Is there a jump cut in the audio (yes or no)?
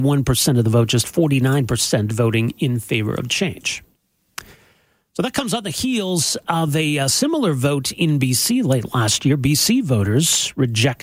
no